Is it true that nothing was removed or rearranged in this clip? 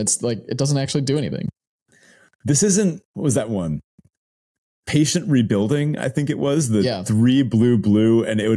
no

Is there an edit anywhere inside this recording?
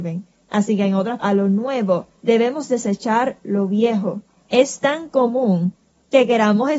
yes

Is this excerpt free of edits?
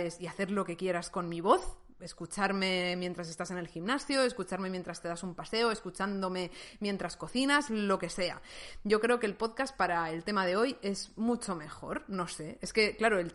yes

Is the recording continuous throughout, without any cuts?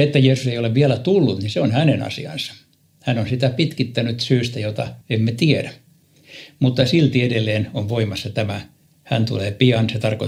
no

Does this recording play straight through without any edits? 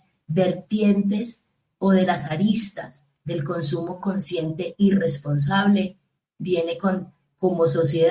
yes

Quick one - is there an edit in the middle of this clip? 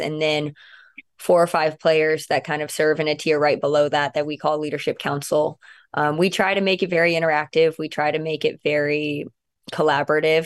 no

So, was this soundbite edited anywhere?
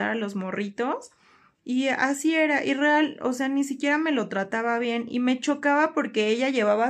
no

